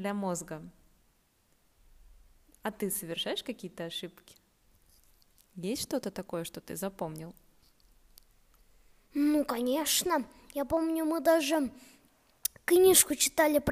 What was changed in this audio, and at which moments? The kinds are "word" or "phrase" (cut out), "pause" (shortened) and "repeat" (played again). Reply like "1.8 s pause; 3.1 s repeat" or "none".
none